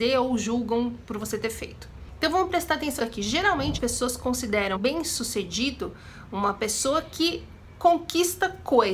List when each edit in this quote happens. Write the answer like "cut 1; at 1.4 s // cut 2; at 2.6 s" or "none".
cut 1; at 3.0 s // cut 2; at 3.8 s // cut 3; at 4.8 s